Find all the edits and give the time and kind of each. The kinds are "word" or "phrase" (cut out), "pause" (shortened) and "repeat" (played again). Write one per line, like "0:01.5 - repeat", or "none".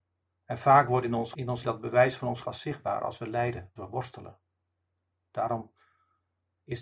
0:01.3 - word
0:01.6 - word
0:02.4 - word
0:03.8 - phrase